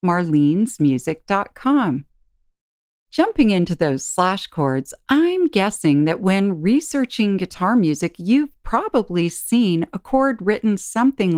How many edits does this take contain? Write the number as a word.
zero